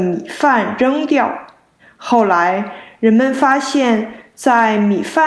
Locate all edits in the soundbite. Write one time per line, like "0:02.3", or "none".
0:01.8